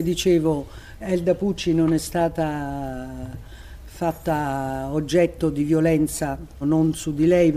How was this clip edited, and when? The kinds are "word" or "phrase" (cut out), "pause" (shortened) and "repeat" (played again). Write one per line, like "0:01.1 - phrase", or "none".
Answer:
0:01.0 - word
0:06.6 - word